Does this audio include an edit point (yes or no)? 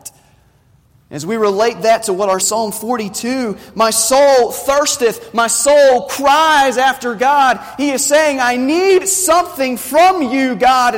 yes